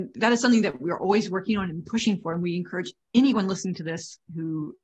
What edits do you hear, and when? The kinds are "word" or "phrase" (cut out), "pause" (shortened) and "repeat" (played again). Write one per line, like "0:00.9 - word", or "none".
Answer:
0:03.0 - pause